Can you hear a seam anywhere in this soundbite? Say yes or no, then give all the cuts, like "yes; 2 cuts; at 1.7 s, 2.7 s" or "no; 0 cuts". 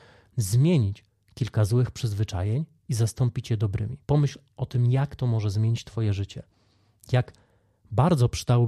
yes; 1 cut; at 4.0 s